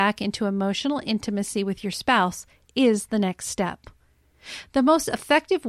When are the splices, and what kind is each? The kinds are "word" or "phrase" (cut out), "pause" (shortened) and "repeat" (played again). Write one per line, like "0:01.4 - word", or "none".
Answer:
none